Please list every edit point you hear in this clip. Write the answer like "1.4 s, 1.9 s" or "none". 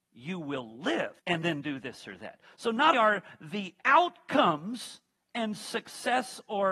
1.2 s, 2.9 s

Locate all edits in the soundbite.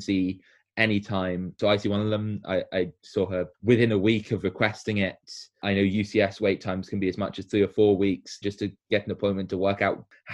3.5 s, 8.4 s

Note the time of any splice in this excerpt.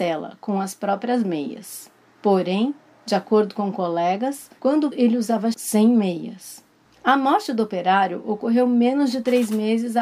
4.9 s, 5.5 s

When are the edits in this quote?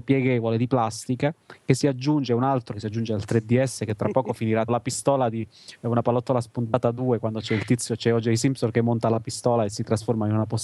2.7 s, 4.7 s

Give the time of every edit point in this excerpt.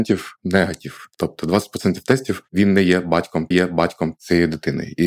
3.5 s

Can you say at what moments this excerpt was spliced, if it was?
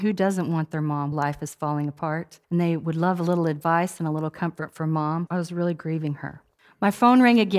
1.1 s, 2.4 s, 5.3 s, 6.6 s

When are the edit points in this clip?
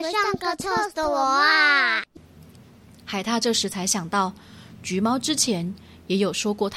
none

